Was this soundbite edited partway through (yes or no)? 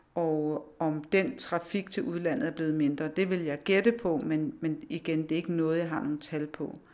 no